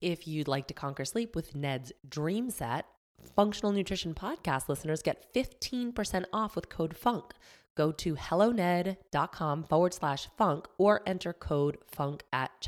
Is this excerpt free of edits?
yes; 0 cuts

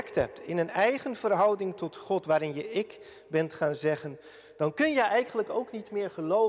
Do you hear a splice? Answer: no; 0 cuts

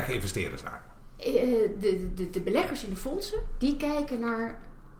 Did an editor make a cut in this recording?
no; 0 cuts

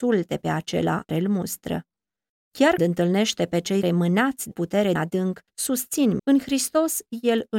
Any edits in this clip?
yes; 6 cuts; at 1.1 s, 2.8 s, 3.8 s, 4.5 s, 5.0 s, 6.2 s

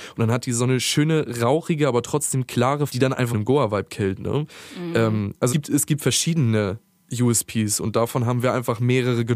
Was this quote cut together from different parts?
yes; 3 cuts; at 2.9 s, 3.3 s, 5.5 s

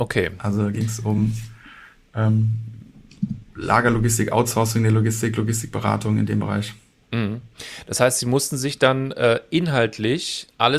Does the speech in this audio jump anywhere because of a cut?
no; 0 cuts

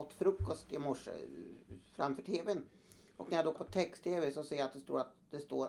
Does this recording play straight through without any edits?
no; 1 cut; at 3.6 s

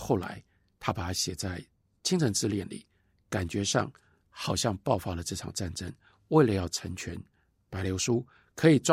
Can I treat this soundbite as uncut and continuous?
yes; 0 cuts

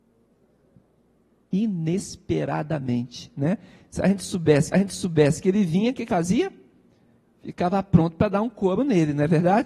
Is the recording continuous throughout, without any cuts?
no; 2 cuts; at 4.7 s, 6.1 s

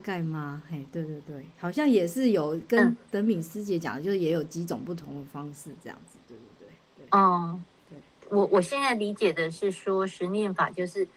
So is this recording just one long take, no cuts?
yes; 0 cuts

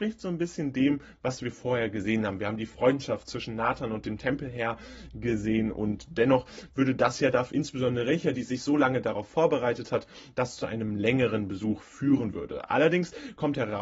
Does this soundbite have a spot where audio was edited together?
yes; 1 cut; at 7.5 s

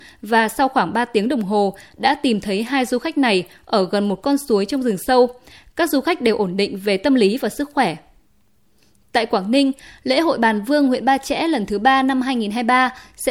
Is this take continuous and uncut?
yes; 0 cuts

